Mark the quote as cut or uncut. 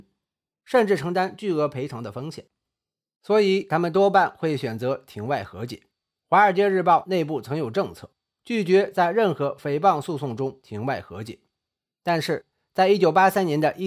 uncut